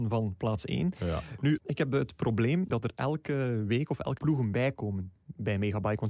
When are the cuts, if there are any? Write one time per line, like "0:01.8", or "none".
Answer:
0:01.6
0:02.7
0:04.2